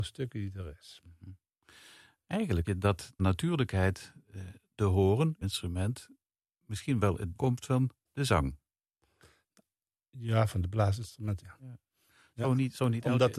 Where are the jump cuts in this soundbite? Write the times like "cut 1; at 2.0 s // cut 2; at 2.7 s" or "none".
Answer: cut 1; at 2.6 s // cut 2; at 3.2 s // cut 3; at 5.4 s // cut 4; at 7.3 s // cut 5; at 8.1 s // cut 6; at 11.4 s